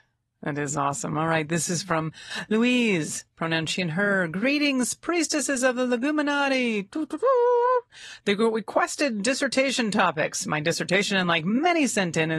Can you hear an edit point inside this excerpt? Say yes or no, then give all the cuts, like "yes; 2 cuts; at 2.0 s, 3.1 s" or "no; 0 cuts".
no; 0 cuts